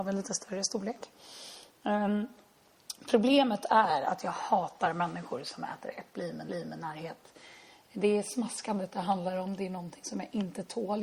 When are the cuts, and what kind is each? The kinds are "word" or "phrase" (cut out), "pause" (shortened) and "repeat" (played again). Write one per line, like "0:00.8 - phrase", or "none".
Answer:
0:06.5 - repeat